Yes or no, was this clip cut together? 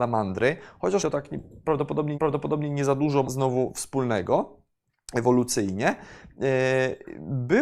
yes